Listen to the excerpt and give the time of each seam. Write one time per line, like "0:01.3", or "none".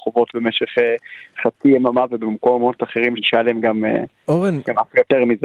0:03.2